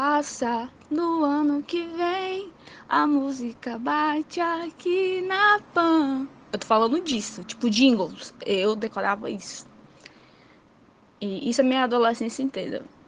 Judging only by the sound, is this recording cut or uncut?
uncut